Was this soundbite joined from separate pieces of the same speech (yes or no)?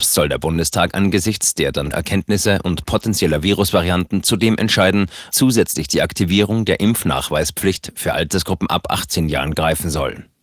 yes